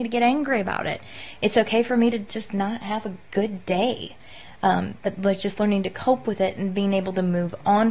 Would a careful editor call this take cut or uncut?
uncut